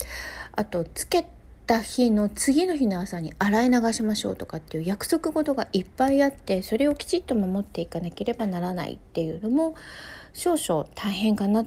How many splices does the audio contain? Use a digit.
0